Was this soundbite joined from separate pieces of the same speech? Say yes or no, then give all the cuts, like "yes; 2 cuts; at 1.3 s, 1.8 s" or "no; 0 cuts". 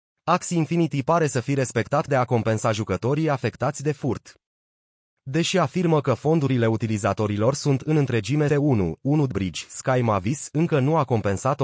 yes; 3 cuts; at 2.1 s, 8.5 s, 9.3 s